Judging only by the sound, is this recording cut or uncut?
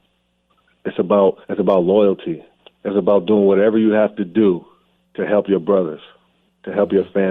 cut